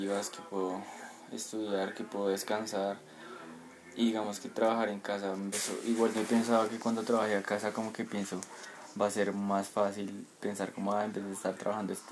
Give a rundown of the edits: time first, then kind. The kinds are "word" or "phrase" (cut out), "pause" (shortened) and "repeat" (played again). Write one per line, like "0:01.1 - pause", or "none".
0:05.5 - word
0:06.1 - word
0:07.4 - word
0:10.3 - pause